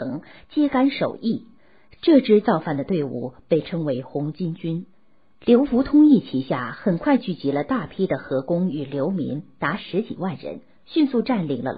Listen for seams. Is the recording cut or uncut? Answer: uncut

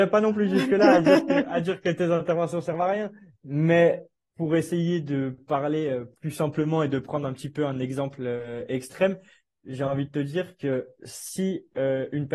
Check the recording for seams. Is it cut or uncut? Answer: uncut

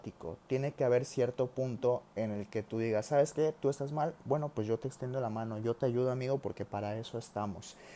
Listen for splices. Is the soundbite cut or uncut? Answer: uncut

